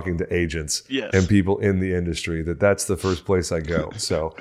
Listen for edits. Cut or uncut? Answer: uncut